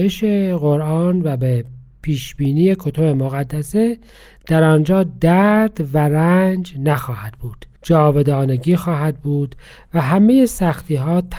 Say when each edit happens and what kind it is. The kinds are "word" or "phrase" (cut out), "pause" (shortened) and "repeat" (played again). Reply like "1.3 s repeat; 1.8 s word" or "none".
none